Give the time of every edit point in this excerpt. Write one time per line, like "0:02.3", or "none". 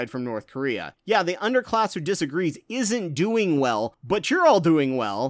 none